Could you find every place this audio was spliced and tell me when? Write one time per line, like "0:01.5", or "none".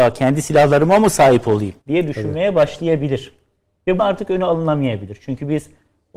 0:01.8
0:04.0